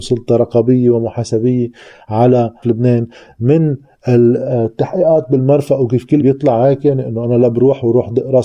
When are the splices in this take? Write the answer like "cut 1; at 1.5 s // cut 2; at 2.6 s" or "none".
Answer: cut 1; at 2.6 s // cut 2; at 6.2 s